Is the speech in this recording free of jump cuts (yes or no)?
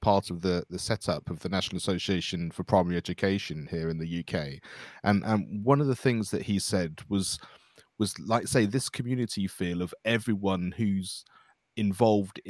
yes